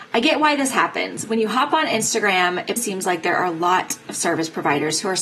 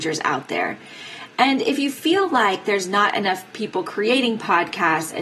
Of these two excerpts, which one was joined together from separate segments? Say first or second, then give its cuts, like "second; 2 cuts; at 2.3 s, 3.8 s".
first; 1 cut; at 2.8 s